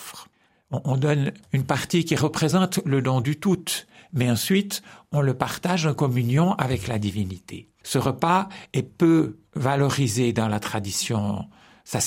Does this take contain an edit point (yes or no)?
yes